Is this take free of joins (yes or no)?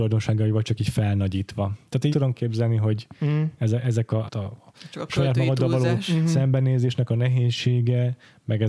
no